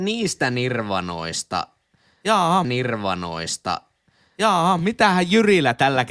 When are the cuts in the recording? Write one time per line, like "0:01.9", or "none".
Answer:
0:02.6

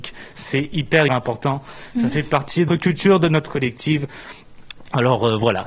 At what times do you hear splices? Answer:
0:01.1
0:02.7
0:03.5

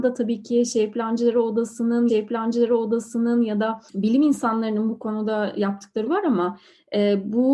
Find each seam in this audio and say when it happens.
0:02.1
0:03.9
0:06.1

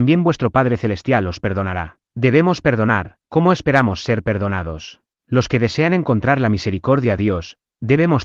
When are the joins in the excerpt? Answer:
0:02.0
0:03.2
0:05.1

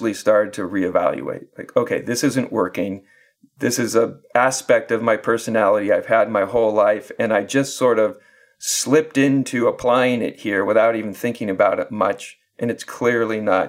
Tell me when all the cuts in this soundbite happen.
none

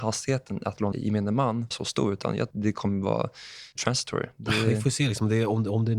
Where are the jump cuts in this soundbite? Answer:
0:00.9
0:01.7
0:02.5
0:03.8

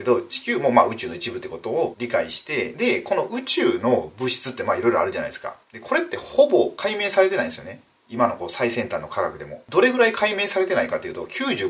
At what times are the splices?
0:05.6

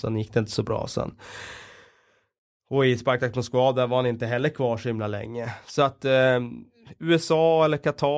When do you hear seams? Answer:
none

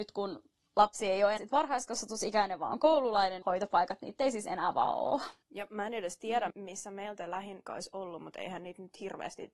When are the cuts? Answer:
0:01.4
0:03.4
0:05.4
0:06.5
0:07.7

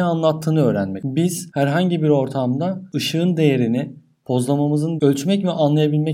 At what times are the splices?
0:05.0

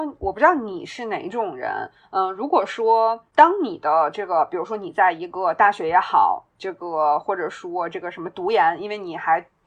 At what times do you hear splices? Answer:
none

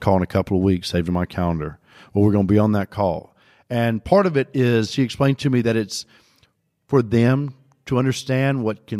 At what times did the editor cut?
none

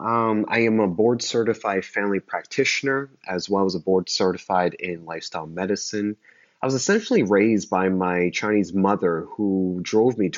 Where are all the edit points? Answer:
none

